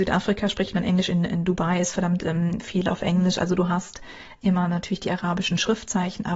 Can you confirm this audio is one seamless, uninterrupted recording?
yes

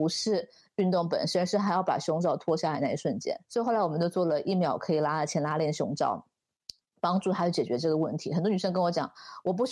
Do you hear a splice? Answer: yes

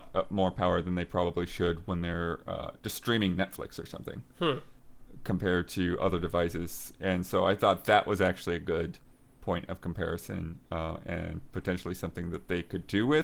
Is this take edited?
no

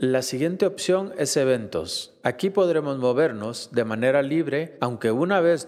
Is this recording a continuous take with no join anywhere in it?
yes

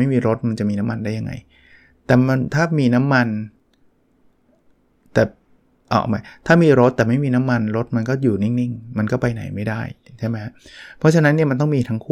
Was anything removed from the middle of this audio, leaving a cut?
no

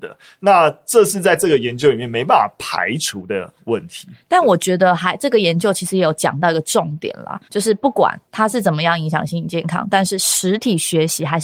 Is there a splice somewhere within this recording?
yes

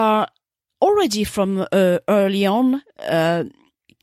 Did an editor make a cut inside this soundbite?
no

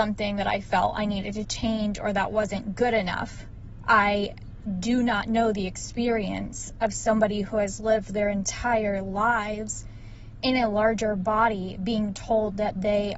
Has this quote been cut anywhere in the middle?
no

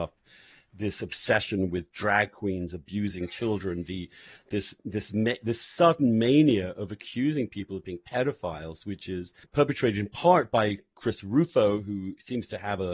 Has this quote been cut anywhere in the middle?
yes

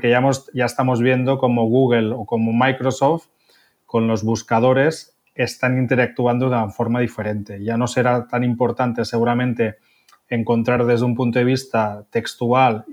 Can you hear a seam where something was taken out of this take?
no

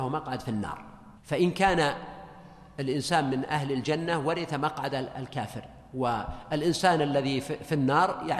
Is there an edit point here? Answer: yes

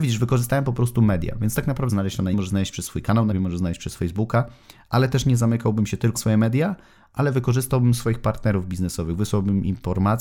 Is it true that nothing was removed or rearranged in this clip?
no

